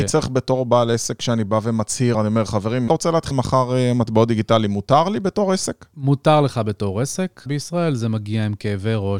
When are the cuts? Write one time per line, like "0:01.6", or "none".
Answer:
0:02.1
0:02.9
0:03.3
0:07.5